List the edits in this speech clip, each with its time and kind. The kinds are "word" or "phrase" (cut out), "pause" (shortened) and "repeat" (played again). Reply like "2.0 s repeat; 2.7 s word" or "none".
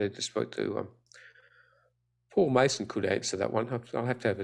none